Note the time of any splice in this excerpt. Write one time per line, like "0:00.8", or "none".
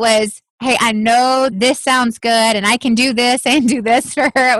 0:01.5